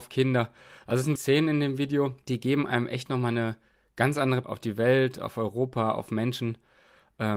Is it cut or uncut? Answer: cut